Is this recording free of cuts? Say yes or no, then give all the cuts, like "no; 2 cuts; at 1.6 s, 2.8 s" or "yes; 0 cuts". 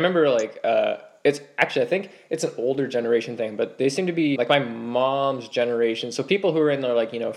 no; 1 cut; at 4.4 s